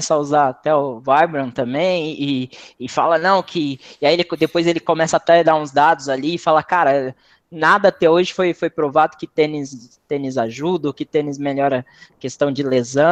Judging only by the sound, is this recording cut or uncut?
uncut